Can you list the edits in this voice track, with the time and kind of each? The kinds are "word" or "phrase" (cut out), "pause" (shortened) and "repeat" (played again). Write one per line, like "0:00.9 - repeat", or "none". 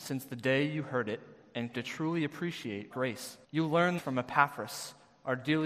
0:01.7 - word
0:02.9 - word
0:03.4 - pause
0:04.0 - word